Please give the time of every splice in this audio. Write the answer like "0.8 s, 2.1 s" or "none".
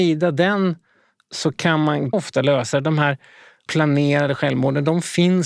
2.1 s, 3.7 s